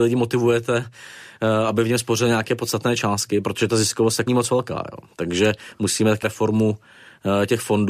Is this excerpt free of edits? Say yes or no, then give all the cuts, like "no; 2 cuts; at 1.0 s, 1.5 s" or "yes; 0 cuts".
no; 2 cuts; at 4.3 s, 6.2 s